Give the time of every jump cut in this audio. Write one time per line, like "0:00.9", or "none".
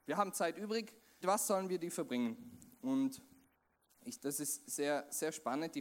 0:01.2
0:04.2